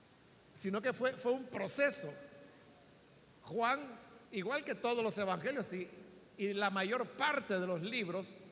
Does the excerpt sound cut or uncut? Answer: cut